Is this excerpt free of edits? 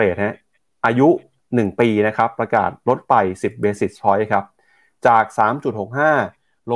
yes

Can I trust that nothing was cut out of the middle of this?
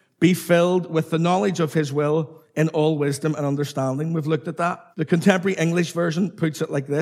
no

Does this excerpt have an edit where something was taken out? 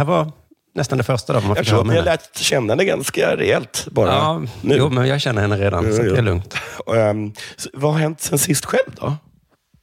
no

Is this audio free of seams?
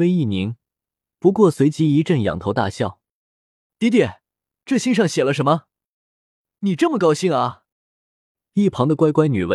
no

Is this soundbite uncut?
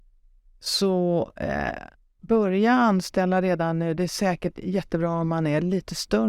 no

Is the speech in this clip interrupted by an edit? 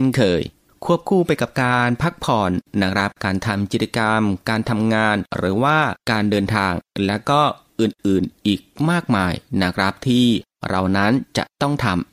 yes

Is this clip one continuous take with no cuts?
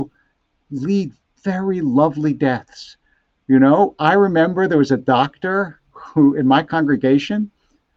yes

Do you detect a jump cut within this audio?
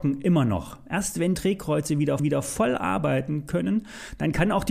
yes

